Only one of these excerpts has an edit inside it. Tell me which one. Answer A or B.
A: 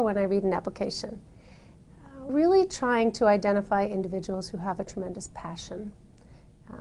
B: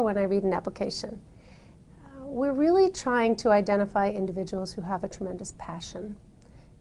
A